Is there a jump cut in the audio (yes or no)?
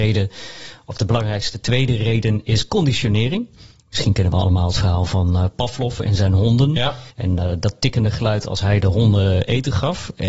yes